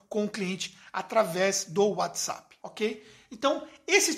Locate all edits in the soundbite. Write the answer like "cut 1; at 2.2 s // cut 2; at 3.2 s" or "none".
cut 1; at 2.6 s